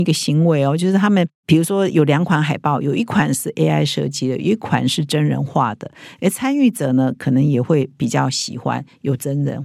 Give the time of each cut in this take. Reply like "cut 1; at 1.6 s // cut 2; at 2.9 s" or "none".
none